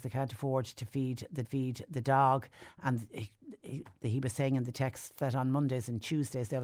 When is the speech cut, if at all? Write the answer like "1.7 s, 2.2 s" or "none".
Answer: 1.4 s